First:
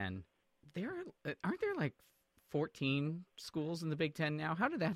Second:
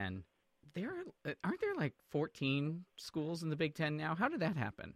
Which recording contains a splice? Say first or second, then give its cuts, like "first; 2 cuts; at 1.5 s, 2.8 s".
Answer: second; 1 cut; at 2.0 s